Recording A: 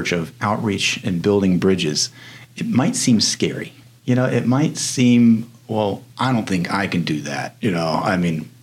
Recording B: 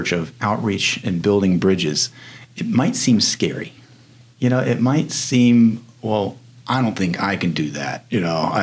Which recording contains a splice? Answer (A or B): A